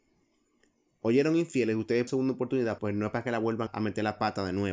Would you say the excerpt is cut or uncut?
cut